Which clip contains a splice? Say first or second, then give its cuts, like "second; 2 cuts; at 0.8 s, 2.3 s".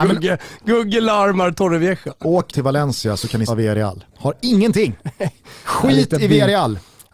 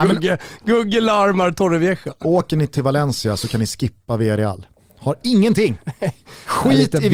first; 3 cuts; at 2.5 s, 3.5 s, 4.1 s